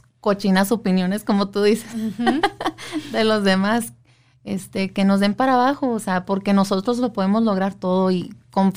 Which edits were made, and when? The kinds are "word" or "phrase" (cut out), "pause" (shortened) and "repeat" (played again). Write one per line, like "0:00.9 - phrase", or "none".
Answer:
none